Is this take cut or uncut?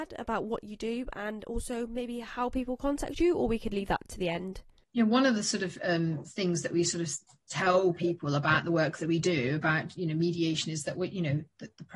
uncut